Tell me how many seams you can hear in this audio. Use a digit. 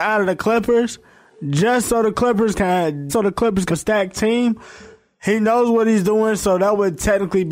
2